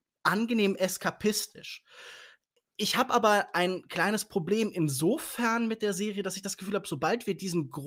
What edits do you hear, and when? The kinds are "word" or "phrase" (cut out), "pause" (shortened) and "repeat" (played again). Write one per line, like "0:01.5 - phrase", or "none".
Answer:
none